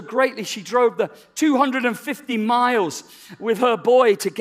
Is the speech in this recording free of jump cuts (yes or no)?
yes